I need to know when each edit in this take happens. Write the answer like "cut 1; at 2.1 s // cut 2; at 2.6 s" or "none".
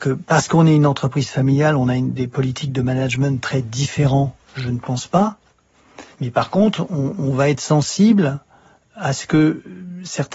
cut 1; at 6.1 s